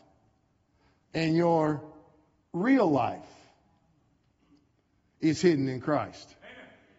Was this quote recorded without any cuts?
yes; 0 cuts

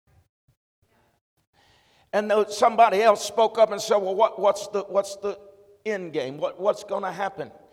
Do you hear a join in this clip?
no; 0 cuts

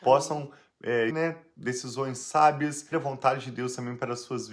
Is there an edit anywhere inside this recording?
yes; 2 cuts; at 1.1 s, 2.9 s

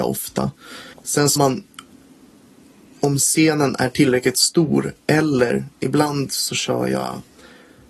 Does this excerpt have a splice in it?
yes; 2 cuts; at 0.9 s, 1.4 s

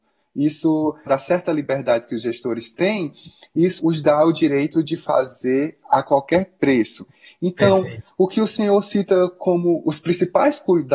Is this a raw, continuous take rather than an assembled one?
no; 2 cuts; at 1.1 s, 3.8 s

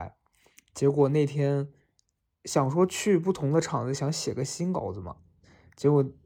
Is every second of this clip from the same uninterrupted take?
yes; 0 cuts

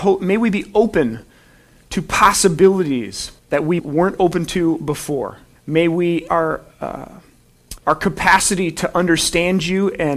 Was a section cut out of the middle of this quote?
yes; 5 cuts; at 3.4 s, 3.8 s, 5.6 s, 6.3 s, 7.8 s

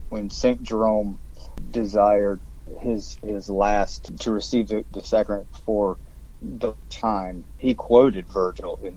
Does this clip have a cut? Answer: no; 0 cuts

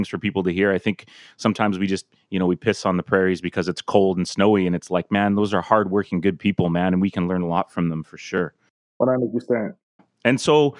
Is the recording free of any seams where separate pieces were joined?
yes; 0 cuts

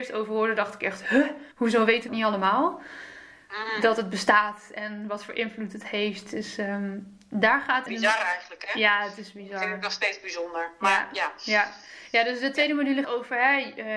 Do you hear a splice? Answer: yes; 4 cuts; at 1.5 s, 2.1 s, 7.9 s, 13.0 s

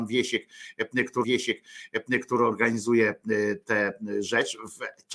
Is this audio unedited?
no; 1 cut; at 1.2 s

